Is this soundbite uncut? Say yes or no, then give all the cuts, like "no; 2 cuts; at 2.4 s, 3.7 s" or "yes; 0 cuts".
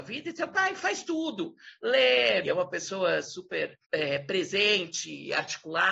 no; 2 cuts; at 2.4 s, 3.8 s